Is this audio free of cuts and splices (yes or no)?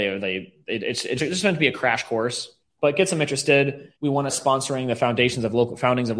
no